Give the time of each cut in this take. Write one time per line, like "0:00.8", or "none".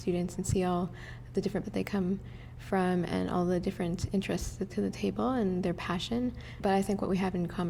0:01.6
0:04.7